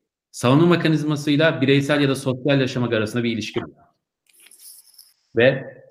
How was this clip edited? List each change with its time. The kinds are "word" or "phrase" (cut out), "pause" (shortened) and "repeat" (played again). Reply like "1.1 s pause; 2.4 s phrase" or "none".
3.6 s word